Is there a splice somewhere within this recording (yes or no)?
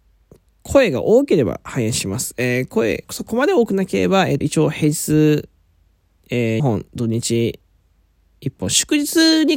yes